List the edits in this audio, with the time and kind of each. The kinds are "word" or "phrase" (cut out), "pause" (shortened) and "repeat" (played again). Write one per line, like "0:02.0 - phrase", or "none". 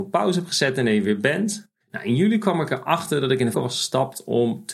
0:01.8 - pause
0:03.5 - word